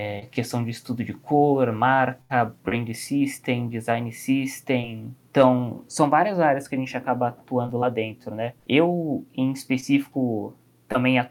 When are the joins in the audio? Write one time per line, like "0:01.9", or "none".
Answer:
0:02.6
0:05.2
0:08.6